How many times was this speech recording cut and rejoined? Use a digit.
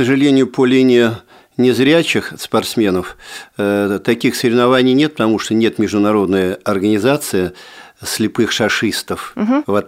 0